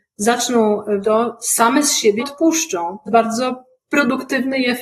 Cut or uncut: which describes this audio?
cut